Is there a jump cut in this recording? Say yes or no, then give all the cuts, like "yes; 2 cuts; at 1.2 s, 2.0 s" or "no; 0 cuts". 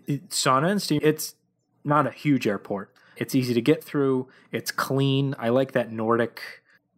yes; 1 cut; at 1.0 s